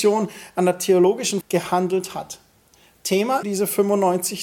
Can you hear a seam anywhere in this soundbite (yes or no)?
yes